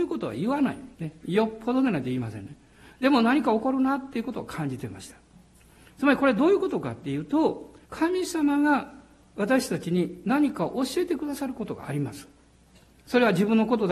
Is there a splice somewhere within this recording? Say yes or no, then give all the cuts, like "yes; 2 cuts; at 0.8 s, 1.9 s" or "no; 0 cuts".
yes; 2 cuts; at 0.9 s, 7.8 s